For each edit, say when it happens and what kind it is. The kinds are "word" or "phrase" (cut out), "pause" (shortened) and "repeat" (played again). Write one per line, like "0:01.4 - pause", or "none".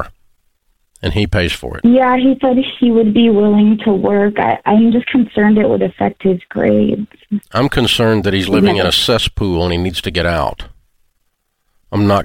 0:07.4 - pause